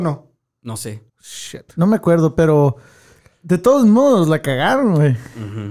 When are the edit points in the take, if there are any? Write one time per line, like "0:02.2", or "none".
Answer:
0:01.1